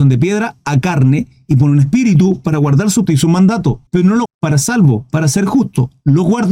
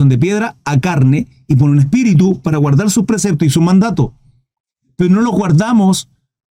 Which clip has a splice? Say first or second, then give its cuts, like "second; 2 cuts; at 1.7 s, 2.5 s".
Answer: first; 4 cuts; at 3.1 s, 3.9 s, 4.3 s, 4.6 s